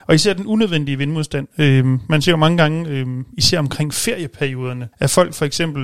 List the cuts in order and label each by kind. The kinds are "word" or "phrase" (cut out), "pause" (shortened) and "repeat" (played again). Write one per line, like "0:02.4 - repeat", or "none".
0:04.9 - pause